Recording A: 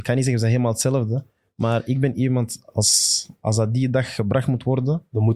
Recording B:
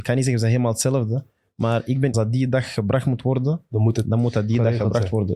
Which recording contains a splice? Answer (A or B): B